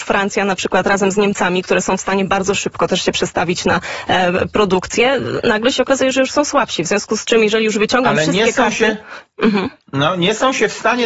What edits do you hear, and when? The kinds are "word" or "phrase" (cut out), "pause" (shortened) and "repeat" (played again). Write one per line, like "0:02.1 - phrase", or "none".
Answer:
none